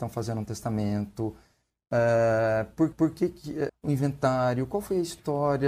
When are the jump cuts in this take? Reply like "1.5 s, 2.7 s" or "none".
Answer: 2.9 s, 3.7 s